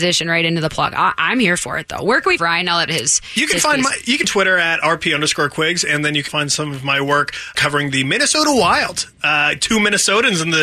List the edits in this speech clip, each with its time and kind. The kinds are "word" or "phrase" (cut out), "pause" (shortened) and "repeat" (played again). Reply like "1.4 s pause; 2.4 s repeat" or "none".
2.4 s phrase; 2.9 s phrase; 4.2 s phrase; 6.3 s word; 7.5 s word